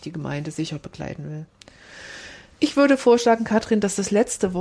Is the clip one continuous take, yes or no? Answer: yes